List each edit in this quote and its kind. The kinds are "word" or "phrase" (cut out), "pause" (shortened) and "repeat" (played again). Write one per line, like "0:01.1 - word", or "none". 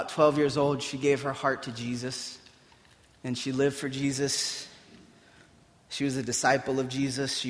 none